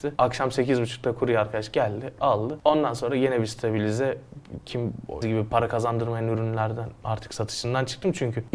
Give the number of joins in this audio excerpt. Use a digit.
2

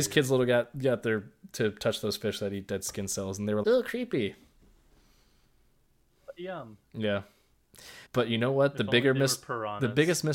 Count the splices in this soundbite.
2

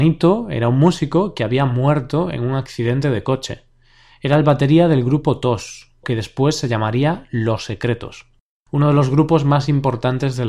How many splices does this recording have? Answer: 1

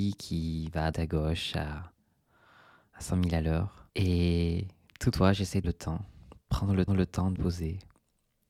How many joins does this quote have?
6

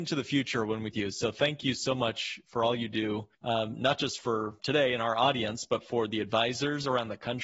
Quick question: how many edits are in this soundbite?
3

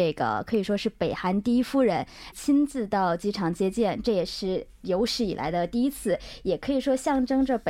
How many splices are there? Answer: 1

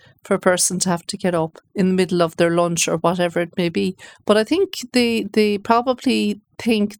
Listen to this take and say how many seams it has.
1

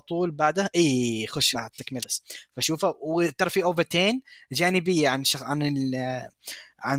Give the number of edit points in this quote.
2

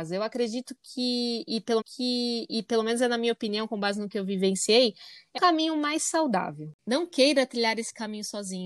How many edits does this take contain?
2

